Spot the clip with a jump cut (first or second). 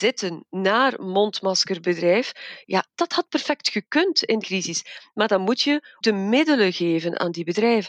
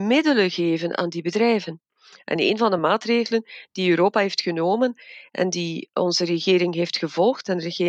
first